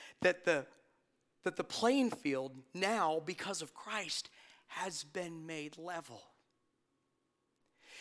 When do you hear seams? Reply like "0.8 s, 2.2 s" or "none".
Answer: none